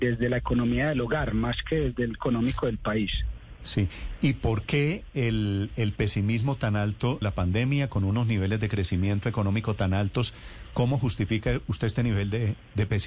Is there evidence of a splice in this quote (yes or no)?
yes